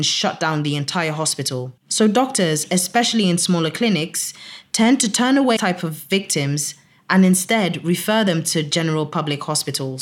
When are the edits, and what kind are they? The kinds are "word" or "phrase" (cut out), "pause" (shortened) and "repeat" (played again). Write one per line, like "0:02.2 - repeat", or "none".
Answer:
0:01.8 - pause
0:05.6 - word